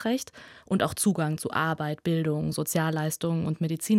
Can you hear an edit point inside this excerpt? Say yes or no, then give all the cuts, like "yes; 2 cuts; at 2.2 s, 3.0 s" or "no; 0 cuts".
no; 0 cuts